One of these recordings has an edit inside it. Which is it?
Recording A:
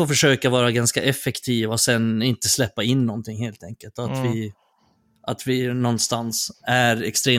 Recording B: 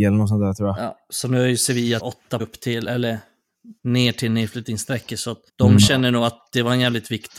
B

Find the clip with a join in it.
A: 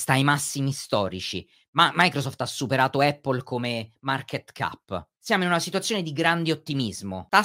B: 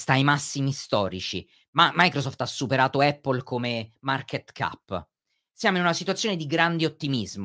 A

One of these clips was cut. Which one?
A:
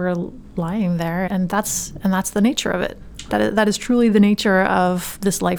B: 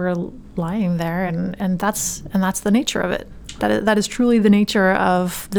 A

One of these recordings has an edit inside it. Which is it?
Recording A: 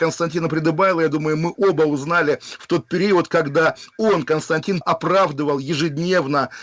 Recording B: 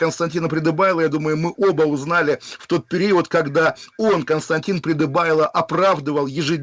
A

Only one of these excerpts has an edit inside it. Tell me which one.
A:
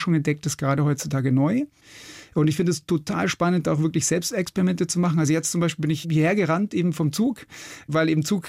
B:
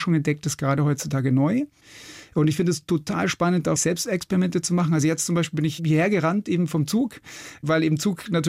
B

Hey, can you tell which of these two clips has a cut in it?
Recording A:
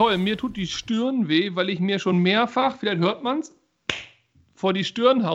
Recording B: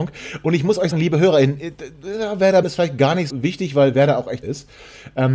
B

